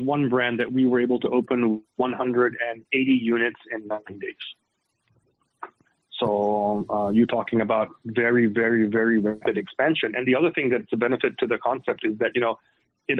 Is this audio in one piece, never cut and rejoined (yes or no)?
yes